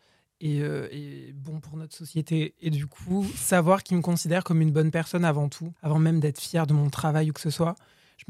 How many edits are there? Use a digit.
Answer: 2